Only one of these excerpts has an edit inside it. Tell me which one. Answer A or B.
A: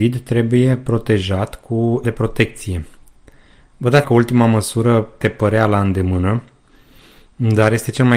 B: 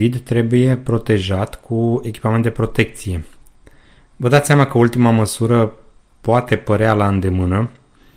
A